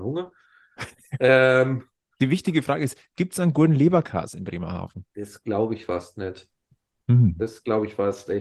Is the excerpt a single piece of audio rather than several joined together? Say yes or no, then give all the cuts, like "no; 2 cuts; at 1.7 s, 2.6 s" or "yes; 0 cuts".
yes; 0 cuts